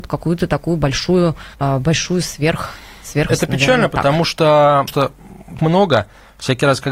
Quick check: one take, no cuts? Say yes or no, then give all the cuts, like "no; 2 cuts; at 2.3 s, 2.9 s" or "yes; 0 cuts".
no; 4 cuts; at 1.5 s, 3.3 s, 4.9 s, 5.6 s